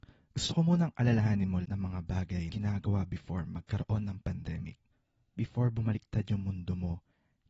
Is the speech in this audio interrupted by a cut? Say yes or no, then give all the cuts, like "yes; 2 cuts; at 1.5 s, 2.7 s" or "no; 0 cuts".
yes; 3 cuts; at 1.6 s, 2.5 s, 4.9 s